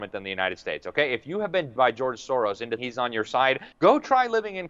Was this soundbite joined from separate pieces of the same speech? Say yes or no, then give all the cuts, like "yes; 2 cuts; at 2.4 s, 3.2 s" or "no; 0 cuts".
yes; 3 cuts; at 1.8 s, 2.8 s, 3.7 s